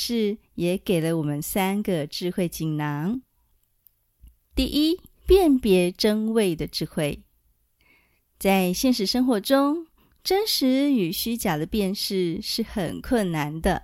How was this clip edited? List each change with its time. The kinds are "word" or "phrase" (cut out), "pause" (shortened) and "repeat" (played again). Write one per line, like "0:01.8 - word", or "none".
0:05.2 - pause